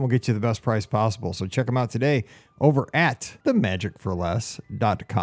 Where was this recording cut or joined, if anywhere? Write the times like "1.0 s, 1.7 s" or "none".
3.4 s